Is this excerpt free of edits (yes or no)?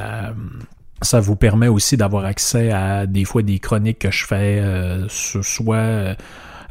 yes